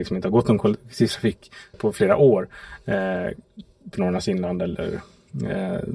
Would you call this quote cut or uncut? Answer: cut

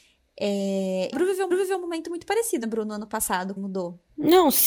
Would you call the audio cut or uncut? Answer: cut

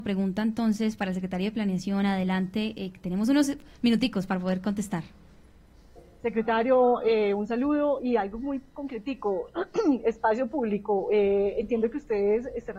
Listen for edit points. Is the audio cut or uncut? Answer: uncut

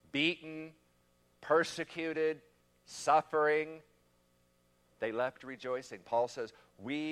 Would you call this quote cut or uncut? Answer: uncut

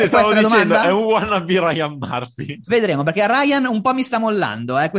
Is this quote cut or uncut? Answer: uncut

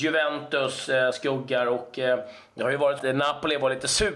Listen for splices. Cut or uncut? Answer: cut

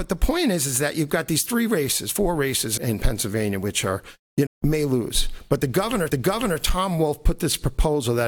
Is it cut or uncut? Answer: cut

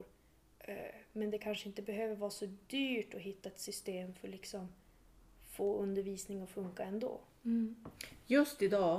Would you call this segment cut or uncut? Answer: uncut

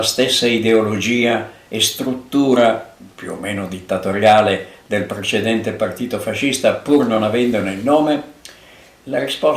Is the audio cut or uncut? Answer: uncut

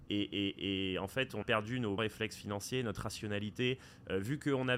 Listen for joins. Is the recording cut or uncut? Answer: cut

